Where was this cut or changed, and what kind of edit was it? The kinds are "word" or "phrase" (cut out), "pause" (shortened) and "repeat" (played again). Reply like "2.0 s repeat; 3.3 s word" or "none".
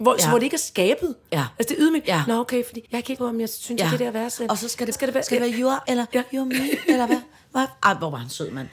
2.8 s pause; 3.2 s word; 4.9 s phrase; 5.8 s word